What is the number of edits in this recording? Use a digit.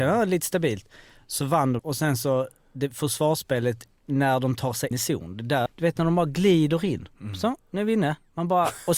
3